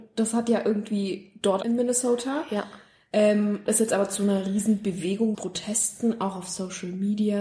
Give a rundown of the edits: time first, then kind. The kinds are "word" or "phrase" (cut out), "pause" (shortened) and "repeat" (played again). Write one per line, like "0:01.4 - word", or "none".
0:01.6 - word
0:03.7 - word
0:05.3 - phrase